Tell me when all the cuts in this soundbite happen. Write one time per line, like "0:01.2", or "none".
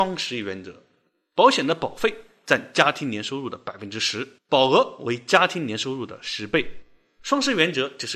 0:04.4